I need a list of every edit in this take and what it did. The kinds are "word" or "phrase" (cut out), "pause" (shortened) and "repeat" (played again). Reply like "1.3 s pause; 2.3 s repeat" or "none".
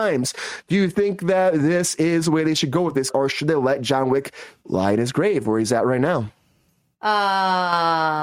3.1 s word